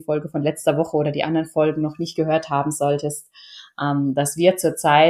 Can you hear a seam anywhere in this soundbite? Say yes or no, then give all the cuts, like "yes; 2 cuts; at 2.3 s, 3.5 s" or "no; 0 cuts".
no; 0 cuts